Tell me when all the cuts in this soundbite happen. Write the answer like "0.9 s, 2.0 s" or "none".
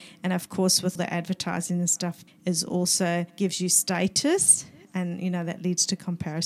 1.0 s, 2.3 s, 3.3 s

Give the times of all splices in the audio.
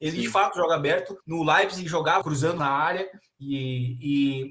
1.2 s, 1.9 s, 2.2 s, 2.6 s

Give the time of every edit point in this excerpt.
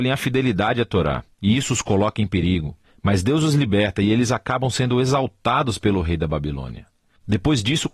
none

